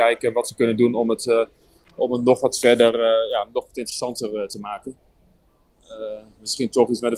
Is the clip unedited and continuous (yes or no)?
yes